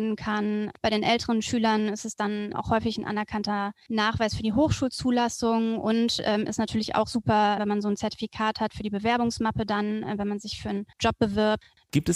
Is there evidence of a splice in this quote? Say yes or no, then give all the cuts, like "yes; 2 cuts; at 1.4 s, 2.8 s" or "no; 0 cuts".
yes; 3 cuts; at 2.5 s, 7.6 s, 10.9 s